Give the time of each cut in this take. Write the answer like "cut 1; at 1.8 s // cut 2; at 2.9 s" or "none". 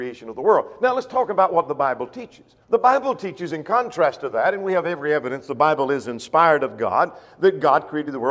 cut 1; at 2.6 s